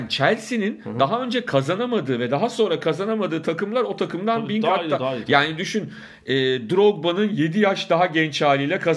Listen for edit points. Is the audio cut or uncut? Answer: uncut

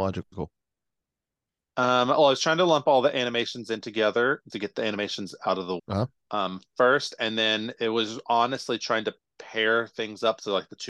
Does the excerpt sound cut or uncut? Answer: cut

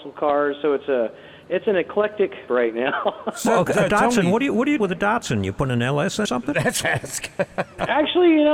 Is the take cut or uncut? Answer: cut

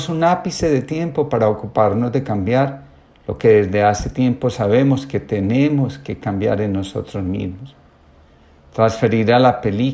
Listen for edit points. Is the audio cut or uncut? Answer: uncut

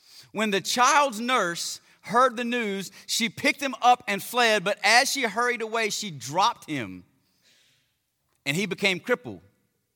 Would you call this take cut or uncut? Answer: uncut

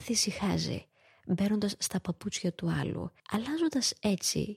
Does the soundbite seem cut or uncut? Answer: cut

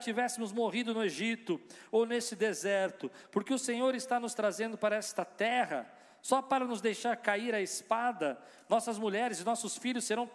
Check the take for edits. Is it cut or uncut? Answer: uncut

